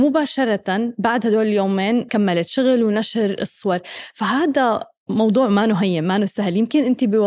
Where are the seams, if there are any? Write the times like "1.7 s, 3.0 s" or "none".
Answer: 2.1 s